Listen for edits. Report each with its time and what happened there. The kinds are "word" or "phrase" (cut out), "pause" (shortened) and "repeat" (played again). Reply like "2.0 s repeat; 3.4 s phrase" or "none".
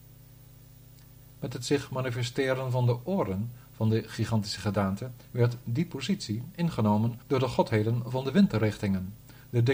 5.2 s pause; 7.2 s pause